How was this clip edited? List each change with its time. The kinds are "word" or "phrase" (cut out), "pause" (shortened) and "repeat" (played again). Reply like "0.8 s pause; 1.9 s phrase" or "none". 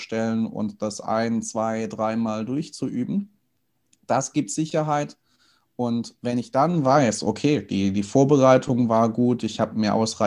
none